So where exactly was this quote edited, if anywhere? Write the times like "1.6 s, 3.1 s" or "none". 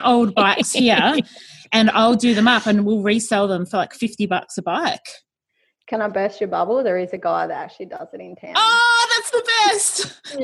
none